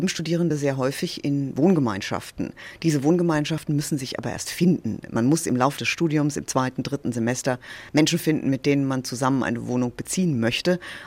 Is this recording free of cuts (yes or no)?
yes